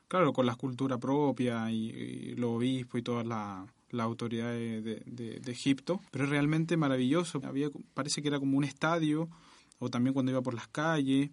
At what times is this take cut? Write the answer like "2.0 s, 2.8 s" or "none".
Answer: 6.1 s, 7.4 s